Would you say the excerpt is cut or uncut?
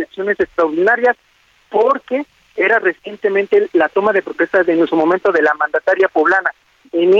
uncut